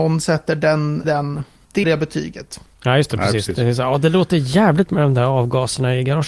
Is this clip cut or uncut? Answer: cut